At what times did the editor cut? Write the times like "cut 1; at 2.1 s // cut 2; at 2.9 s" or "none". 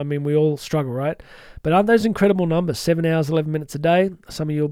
none